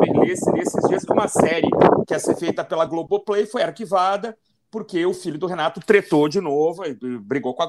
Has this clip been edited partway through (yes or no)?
no